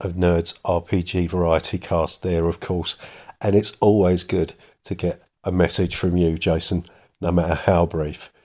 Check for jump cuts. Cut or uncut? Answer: uncut